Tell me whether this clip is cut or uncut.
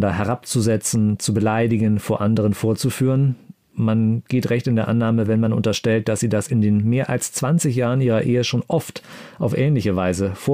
uncut